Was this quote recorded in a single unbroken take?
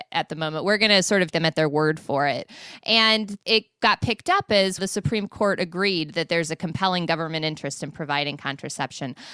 no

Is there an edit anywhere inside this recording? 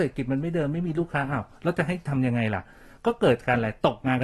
no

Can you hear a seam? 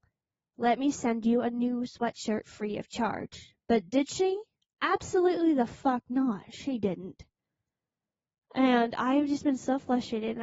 no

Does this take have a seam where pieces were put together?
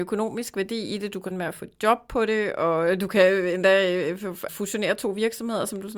yes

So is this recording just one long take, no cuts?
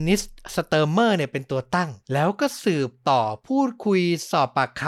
no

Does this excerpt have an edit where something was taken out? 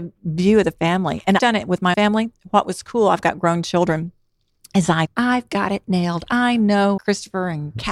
yes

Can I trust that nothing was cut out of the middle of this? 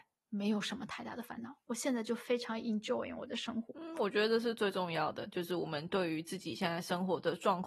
yes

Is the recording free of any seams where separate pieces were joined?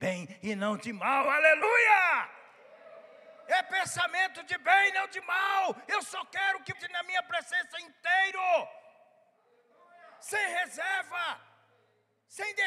no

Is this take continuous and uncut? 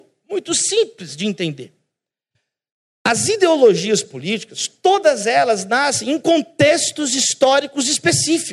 yes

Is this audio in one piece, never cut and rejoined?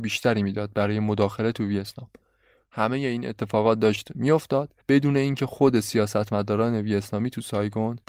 no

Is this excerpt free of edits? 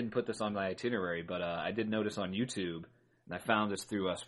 yes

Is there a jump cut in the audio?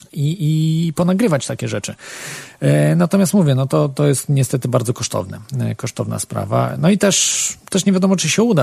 no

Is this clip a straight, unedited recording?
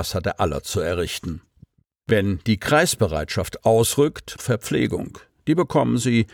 no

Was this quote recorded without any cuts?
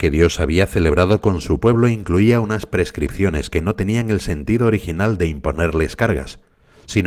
yes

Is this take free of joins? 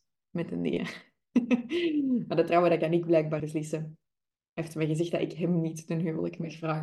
no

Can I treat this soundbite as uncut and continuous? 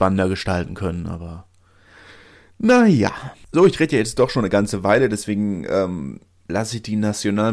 yes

